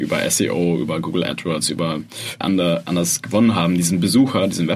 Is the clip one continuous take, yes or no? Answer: no